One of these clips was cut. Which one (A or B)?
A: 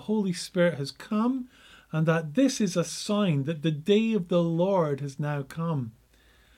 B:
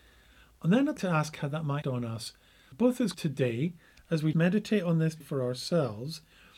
B